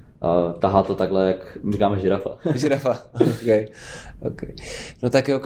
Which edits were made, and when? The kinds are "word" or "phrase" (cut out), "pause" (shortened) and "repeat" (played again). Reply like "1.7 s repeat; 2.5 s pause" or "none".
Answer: 1.7 s word